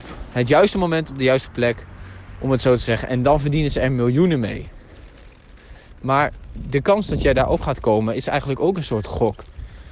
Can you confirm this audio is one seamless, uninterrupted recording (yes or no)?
yes